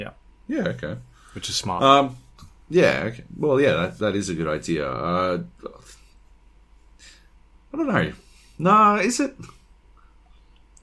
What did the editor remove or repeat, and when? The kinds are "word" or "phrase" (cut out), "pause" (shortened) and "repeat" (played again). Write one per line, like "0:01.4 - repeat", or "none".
none